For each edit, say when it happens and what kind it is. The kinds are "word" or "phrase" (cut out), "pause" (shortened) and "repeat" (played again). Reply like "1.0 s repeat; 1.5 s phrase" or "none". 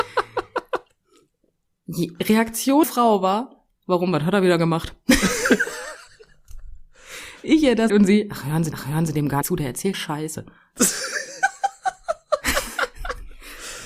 2.8 s word; 3.7 s pause; 6.1 s pause; 7.9 s word; 8.7 s repeat; 9.4 s word; 9.9 s word